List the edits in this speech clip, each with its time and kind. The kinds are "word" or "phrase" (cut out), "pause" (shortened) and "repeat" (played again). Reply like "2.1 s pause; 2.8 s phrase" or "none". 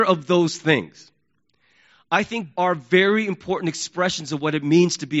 2.5 s word